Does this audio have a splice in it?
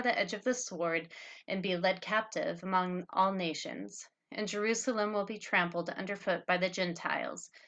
no; 0 cuts

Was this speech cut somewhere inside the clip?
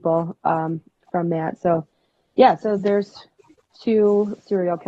no; 0 cuts

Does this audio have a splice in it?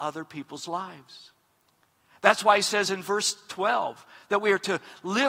no; 0 cuts

